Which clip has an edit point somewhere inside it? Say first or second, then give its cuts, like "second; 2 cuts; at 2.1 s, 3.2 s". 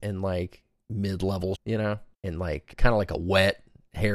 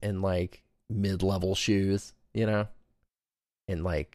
first; 3 cuts; at 1.5 s, 2.1 s, 2.7 s